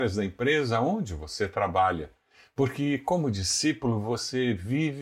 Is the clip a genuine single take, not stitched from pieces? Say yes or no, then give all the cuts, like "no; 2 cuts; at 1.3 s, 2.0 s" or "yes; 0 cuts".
yes; 0 cuts